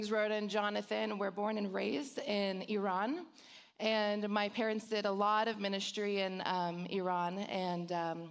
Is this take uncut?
yes; 0 cuts

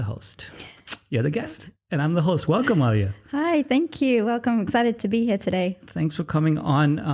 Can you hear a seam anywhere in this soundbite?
yes; 1 cut; at 5.0 s

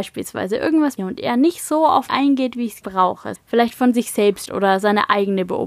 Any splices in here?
yes; 5 cuts; at 1.0 s, 2.1 s, 2.8 s, 3.4 s, 4.5 s

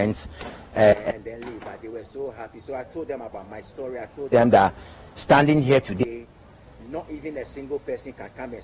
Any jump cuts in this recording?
no; 0 cuts

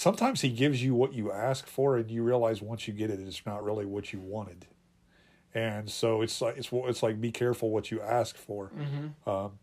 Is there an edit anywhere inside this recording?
no; 0 cuts

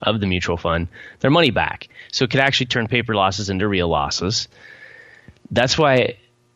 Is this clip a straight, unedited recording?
no; 1 cut; at 5.4 s

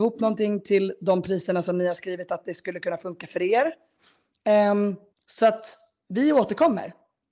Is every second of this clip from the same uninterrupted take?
no; 1 cut; at 5.1 s

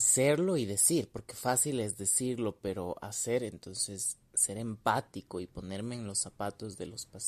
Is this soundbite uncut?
yes; 0 cuts

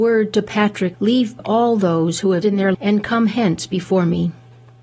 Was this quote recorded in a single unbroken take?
no; 4 cuts; at 0.9 s, 1.4 s, 2.4 s, 2.7 s

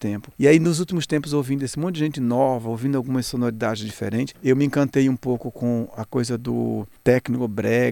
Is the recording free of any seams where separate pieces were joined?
yes; 0 cuts

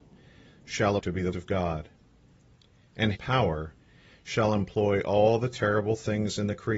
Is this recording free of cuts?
no; 3 cuts; at 1.0 s, 1.3 s, 3.1 s

